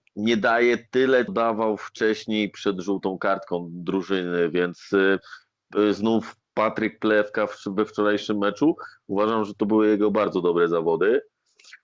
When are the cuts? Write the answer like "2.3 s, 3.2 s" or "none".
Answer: 1.3 s